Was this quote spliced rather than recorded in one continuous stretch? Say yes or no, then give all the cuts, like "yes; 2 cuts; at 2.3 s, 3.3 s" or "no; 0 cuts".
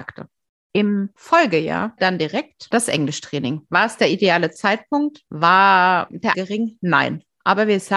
yes; 2 cuts; at 2.0 s, 6.3 s